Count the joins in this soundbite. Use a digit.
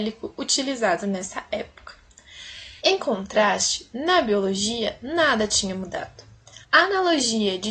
2